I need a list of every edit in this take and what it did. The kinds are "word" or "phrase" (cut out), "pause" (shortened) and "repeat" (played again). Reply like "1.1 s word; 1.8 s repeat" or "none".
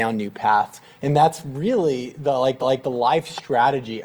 2.6 s repeat